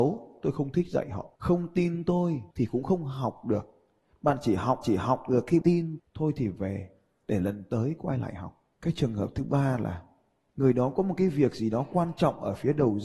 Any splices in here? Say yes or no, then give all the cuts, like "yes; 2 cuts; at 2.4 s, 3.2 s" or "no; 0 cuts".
yes; 6 cuts; at 1.4 s, 2.5 s, 4.8 s, 5.6 s, 6.0 s, 8.7 s